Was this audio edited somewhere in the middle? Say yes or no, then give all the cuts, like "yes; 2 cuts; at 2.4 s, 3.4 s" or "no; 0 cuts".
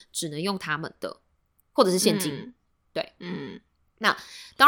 no; 0 cuts